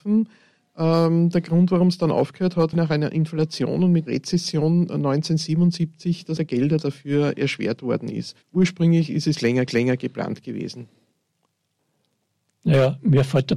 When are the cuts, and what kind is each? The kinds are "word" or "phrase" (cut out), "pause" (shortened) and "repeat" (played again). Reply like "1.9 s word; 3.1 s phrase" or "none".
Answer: 2.7 s word; 4.1 s word; 6.4 s word; 8.4 s pause; 9.7 s repeat